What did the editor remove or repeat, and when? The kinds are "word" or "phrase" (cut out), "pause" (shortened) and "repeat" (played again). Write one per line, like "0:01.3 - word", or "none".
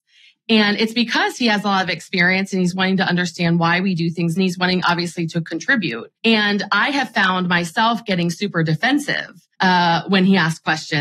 0:04.4 - phrase
0:06.1 - pause
0:09.5 - pause